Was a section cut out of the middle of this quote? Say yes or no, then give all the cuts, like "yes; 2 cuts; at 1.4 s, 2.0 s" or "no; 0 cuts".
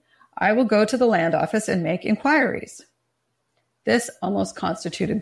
no; 0 cuts